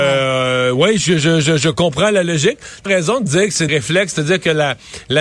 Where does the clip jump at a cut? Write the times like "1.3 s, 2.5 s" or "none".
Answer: 2.9 s, 3.7 s

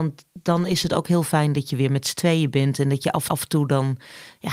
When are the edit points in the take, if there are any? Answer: 3.3 s

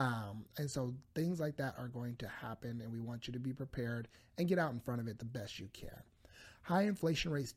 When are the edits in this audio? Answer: none

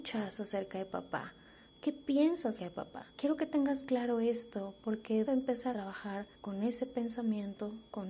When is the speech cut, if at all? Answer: 2.6 s, 3.1 s, 3.8 s, 5.3 s, 5.7 s, 6.3 s

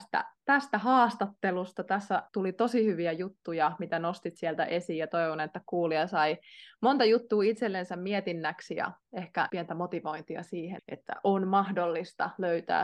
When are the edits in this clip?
2.3 s, 9.5 s, 10.8 s

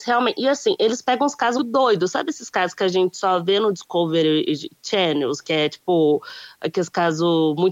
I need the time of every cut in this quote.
1.6 s

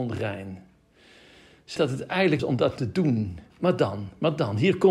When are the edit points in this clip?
1.8 s, 2.4 s, 3.5 s

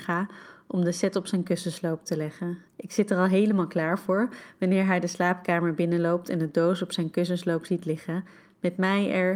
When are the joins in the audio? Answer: 2.7 s

